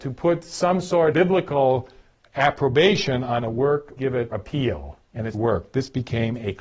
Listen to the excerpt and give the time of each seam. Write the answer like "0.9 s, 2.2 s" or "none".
1.1 s, 4.0 s, 4.3 s, 5.0 s, 5.3 s